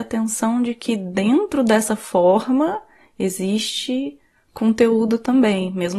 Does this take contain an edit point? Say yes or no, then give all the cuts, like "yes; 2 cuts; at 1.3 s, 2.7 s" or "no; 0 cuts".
no; 0 cuts